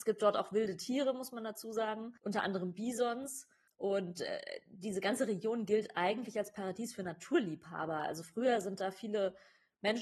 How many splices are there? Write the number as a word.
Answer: two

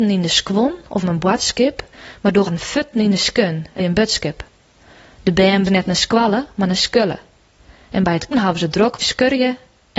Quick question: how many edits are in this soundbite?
six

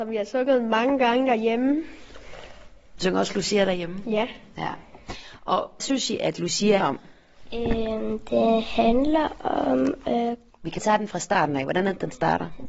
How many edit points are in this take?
four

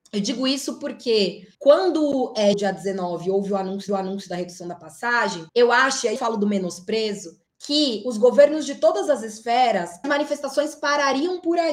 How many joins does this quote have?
seven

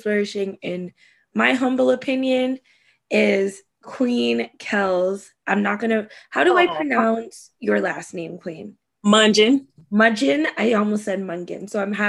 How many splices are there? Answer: zero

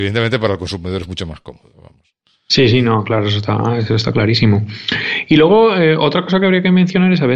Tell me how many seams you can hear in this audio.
zero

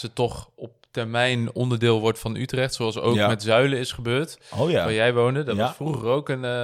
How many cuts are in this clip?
zero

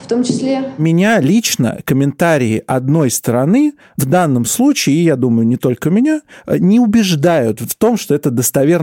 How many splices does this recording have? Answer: zero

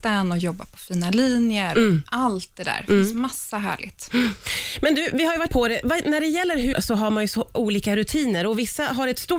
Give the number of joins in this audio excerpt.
three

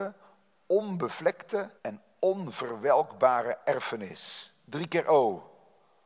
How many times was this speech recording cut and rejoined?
one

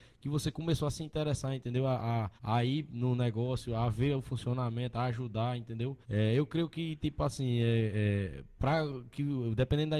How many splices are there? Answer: two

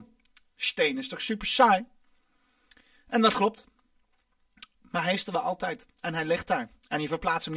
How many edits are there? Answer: zero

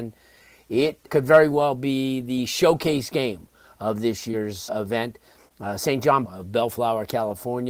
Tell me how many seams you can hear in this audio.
three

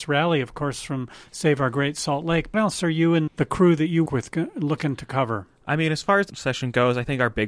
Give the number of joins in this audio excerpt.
four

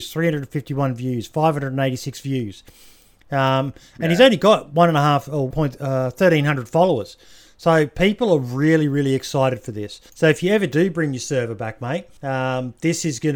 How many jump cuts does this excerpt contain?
three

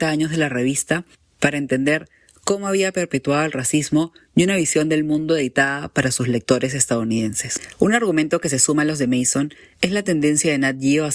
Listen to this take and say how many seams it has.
zero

